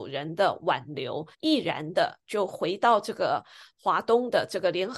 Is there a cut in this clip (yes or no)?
yes